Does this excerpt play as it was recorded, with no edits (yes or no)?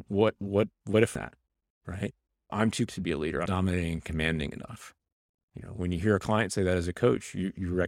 no